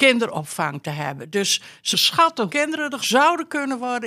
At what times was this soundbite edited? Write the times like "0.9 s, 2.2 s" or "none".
1.9 s, 2.5 s, 3.0 s